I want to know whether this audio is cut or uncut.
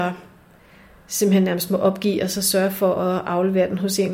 uncut